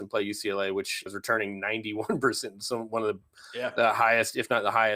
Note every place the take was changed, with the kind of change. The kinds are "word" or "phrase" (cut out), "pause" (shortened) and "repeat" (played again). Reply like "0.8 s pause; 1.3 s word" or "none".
1.1 s phrase